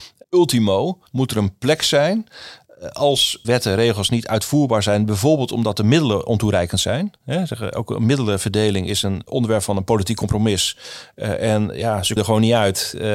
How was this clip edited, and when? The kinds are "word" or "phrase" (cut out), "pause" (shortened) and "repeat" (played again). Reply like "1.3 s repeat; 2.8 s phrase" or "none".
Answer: 1.1 s pause; 3.4 s word; 9.3 s word; 12.2 s word